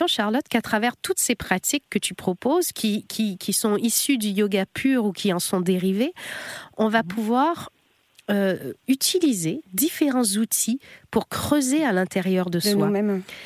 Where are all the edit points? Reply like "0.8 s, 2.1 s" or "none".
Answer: none